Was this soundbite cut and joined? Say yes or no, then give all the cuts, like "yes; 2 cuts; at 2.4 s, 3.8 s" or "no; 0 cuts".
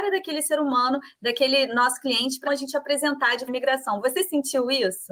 yes; 2 cuts; at 2.5 s, 3.5 s